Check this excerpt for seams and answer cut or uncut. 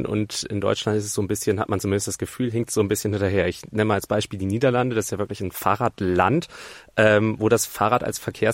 uncut